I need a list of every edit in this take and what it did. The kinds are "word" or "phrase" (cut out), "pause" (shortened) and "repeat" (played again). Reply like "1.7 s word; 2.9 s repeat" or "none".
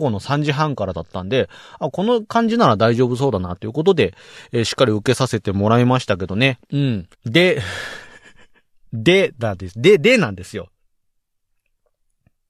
6.6 s pause; 7.1 s pause